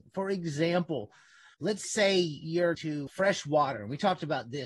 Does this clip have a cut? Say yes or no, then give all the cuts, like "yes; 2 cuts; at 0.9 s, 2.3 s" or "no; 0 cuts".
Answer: yes; 3 cuts; at 1.5 s, 2.7 s, 3.1 s